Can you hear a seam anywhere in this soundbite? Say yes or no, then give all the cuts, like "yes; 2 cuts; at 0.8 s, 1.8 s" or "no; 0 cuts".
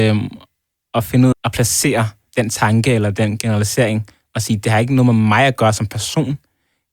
yes; 2 cuts; at 1.3 s, 2.3 s